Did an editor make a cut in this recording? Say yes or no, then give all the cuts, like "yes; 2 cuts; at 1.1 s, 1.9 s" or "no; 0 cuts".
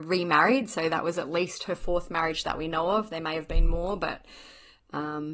no; 0 cuts